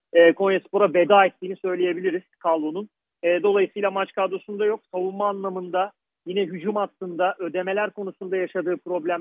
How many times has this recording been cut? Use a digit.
0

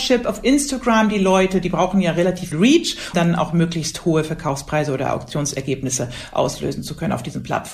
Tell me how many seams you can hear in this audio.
2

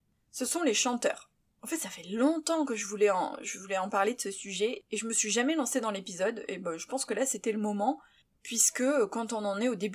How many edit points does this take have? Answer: 0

